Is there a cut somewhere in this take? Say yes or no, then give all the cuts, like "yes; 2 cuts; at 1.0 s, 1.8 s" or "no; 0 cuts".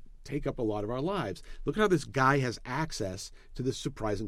no; 0 cuts